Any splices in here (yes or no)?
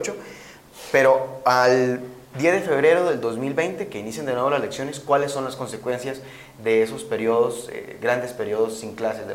no